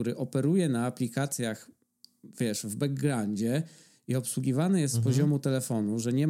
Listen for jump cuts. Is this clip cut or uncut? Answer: uncut